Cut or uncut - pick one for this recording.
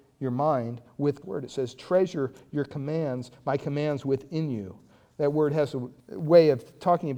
cut